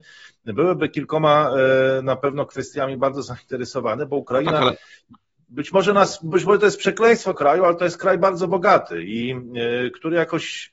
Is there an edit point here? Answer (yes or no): yes